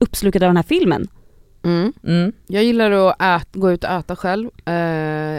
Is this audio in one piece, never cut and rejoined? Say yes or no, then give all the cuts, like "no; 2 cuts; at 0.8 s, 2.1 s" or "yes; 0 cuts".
yes; 0 cuts